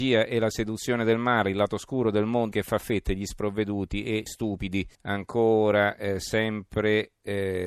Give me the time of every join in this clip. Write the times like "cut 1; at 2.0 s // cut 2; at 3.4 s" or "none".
cut 1; at 2.5 s // cut 2; at 4.3 s // cut 3; at 4.9 s